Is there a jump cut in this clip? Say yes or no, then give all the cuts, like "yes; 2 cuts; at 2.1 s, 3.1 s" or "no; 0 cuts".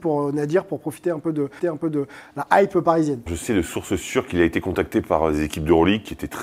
yes; 2 cuts; at 1.6 s, 3.3 s